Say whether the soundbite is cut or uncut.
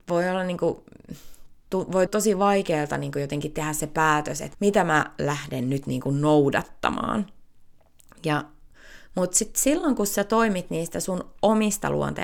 cut